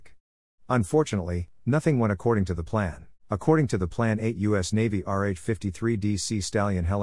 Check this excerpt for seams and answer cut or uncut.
cut